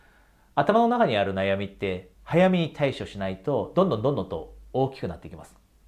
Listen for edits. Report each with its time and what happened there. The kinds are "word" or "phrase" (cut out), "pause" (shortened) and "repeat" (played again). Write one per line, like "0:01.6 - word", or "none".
0:02.2 - pause